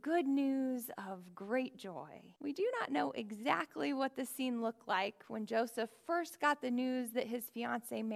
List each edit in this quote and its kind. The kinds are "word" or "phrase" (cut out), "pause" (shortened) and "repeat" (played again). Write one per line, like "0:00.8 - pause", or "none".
0:02.4 - pause

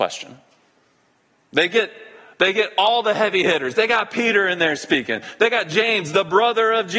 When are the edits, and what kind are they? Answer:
none

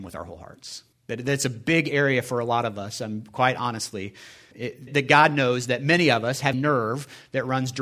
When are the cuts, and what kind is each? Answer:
0:00.9 - pause
0:04.5 - word
0:04.9 - word
0:06.5 - word

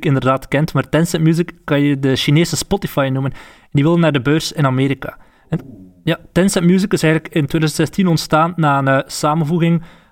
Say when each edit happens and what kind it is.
none

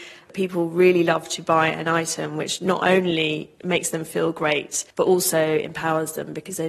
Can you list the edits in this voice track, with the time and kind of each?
0:04.9 - pause

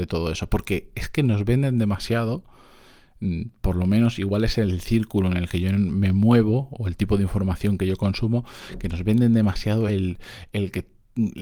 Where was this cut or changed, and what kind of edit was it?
none

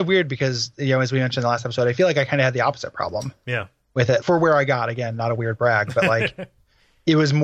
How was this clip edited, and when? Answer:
0:04.2 - word

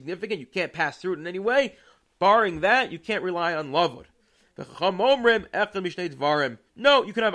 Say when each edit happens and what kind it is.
none

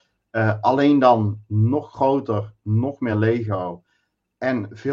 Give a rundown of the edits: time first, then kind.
none

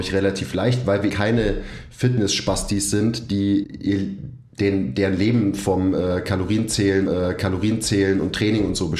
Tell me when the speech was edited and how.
0:01.1 - word
0:03.6 - word
0:07.1 - repeat

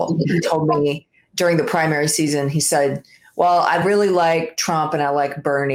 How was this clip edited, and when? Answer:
none

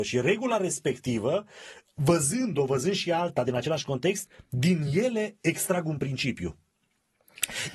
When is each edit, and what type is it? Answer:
none

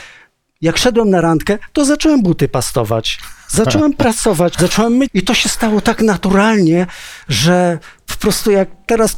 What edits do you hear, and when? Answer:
0:04.5 - word
0:05.1 - word

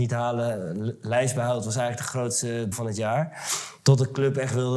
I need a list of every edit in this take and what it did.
0:02.7 - word

